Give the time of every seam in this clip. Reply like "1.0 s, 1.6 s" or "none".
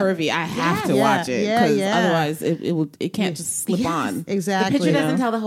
none